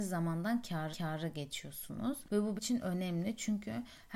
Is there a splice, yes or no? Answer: yes